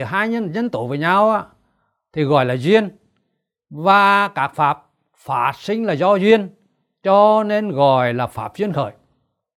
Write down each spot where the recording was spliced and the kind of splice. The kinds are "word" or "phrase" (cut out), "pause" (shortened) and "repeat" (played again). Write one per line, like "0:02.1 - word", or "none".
none